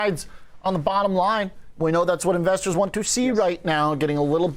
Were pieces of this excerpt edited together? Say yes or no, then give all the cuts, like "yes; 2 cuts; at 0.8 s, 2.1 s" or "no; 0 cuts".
no; 0 cuts